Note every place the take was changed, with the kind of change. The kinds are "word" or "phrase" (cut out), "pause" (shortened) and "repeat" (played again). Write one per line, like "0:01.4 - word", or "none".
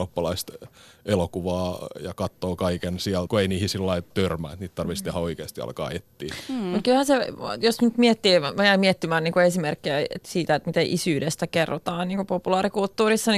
0:03.3 - word
0:04.1 - word